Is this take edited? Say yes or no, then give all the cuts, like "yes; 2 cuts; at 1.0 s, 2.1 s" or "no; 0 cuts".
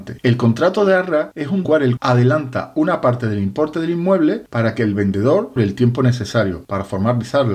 yes; 3 cuts; at 1.6 s, 2.0 s, 5.6 s